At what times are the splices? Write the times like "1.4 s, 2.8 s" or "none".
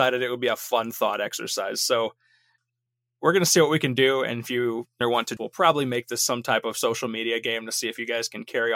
5.0 s, 5.4 s